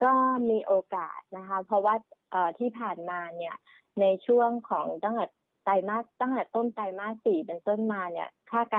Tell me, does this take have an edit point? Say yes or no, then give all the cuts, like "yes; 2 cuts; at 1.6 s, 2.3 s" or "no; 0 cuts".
no; 0 cuts